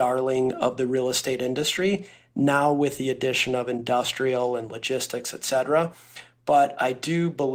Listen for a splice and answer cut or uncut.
uncut